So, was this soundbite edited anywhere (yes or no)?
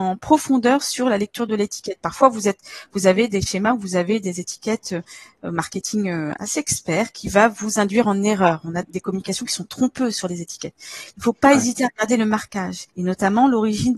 yes